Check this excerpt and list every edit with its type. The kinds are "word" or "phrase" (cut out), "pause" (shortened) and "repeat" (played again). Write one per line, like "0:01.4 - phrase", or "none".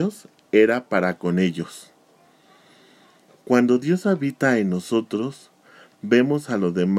none